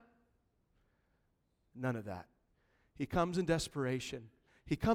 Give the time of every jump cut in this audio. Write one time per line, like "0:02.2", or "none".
0:02.5